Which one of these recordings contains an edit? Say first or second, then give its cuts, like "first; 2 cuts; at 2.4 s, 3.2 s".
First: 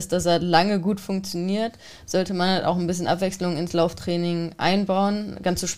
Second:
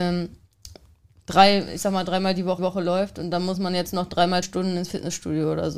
second; 2 cuts; at 2.6 s, 4.4 s